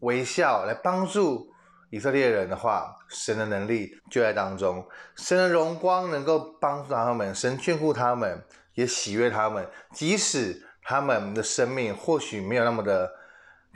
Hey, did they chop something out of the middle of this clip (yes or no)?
yes